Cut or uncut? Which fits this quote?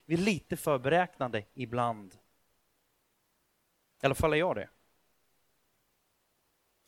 uncut